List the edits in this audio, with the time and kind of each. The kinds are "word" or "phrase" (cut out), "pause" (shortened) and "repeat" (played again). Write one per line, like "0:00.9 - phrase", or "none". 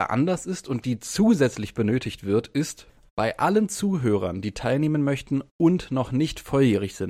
none